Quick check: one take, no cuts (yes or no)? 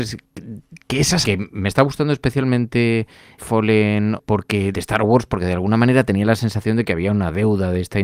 no